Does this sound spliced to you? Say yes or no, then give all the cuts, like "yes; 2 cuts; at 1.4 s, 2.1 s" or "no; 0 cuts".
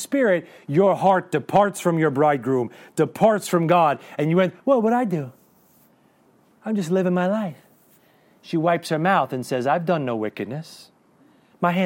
no; 0 cuts